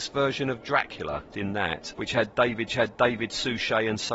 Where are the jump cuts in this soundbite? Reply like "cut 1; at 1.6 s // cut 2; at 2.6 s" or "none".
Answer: cut 1; at 1.3 s // cut 2; at 1.9 s // cut 3; at 2.7 s